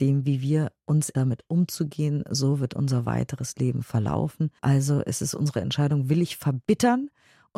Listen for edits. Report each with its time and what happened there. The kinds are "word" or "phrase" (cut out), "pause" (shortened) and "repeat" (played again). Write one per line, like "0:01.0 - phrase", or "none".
0:01.1 - word
0:04.6 - pause